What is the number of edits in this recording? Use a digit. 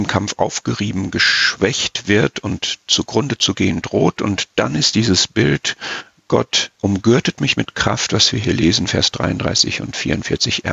1